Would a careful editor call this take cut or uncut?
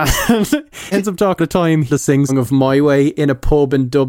cut